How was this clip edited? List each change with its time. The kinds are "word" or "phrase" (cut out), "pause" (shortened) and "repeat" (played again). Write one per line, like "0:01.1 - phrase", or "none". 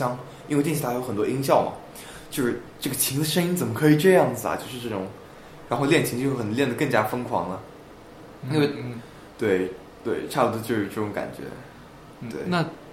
none